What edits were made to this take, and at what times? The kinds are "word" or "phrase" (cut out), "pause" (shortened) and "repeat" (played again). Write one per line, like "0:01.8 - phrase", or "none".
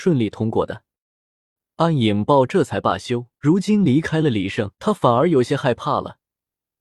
0:03.3 - pause
0:04.7 - pause